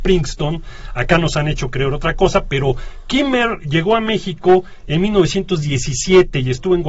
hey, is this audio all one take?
yes; 0 cuts

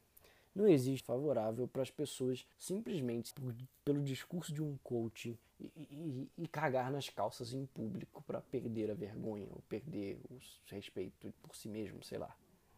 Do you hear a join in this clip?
yes; 4 cuts; at 1.0 s, 2.5 s, 3.3 s, 5.5 s

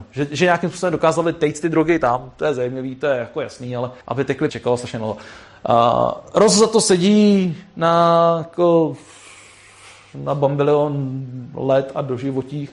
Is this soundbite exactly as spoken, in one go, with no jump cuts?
no; 2 cuts; at 4.0 s, 4.5 s

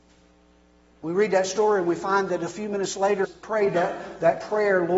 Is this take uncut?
no; 1 cut; at 3.2 s

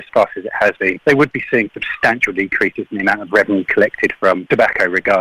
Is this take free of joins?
no; 1 cut; at 1.7 s

